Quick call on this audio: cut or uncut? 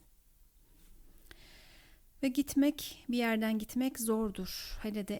uncut